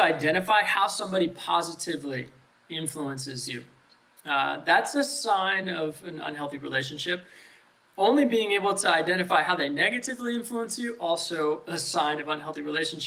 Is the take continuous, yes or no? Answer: yes